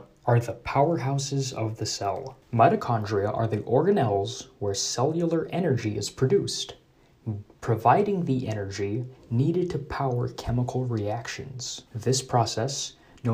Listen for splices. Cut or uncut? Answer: cut